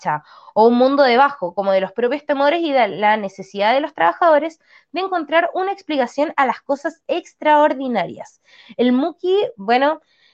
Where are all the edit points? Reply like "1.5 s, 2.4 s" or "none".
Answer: none